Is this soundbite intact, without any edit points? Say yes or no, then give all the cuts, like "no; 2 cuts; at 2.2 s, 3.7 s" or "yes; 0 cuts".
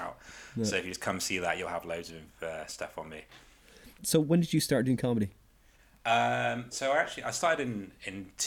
yes; 0 cuts